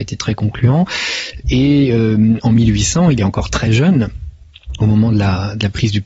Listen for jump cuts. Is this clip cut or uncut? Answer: uncut